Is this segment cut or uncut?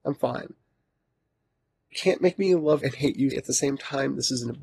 cut